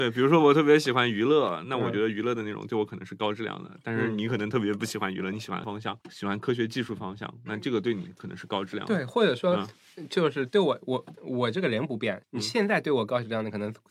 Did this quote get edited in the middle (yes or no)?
yes